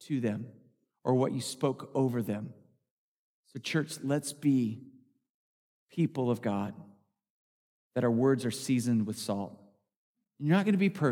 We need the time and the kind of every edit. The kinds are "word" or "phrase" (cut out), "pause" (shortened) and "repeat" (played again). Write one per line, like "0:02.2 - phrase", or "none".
none